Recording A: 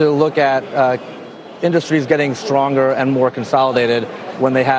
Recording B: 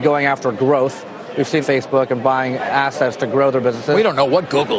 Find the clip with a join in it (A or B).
B